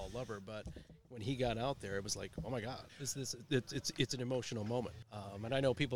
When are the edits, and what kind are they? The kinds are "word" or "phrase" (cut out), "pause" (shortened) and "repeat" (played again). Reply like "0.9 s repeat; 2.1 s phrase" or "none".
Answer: 2.9 s pause; 5.0 s pause